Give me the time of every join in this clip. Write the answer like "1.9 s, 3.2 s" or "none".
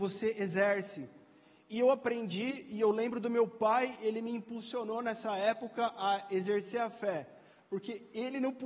none